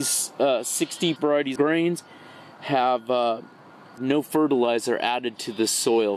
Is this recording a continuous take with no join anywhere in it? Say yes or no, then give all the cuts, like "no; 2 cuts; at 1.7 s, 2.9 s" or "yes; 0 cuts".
no; 3 cuts; at 1.2 s, 1.6 s, 4.0 s